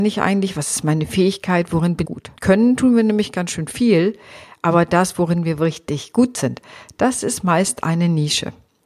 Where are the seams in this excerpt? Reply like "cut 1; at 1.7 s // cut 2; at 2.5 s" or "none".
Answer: cut 1; at 2.0 s // cut 2; at 2.4 s